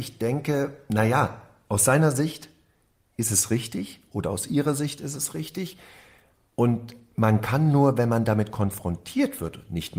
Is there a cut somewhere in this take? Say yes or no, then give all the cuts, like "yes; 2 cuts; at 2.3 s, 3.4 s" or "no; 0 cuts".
no; 0 cuts